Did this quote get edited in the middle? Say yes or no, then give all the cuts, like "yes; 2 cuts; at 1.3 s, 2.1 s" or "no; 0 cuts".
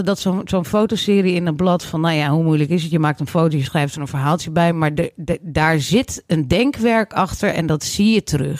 no; 0 cuts